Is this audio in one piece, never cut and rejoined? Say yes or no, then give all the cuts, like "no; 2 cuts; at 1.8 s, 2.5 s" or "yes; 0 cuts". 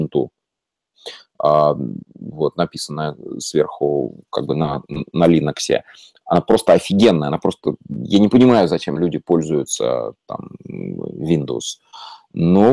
yes; 0 cuts